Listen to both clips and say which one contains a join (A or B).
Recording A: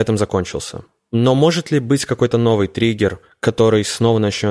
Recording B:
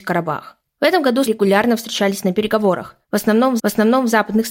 B